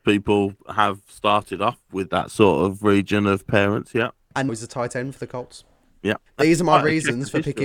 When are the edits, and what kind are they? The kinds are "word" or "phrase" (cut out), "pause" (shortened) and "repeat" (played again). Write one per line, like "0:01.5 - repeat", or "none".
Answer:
0:04.5 - word
0:06.3 - pause